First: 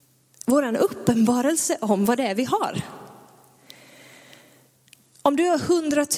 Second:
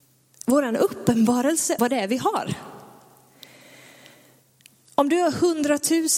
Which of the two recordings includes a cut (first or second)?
second